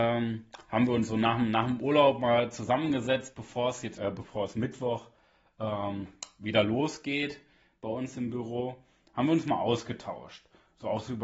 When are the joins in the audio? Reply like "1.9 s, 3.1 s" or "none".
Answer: 4.0 s